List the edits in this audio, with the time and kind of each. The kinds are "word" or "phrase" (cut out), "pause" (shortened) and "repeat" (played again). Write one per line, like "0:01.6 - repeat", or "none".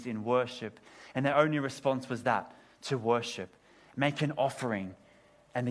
none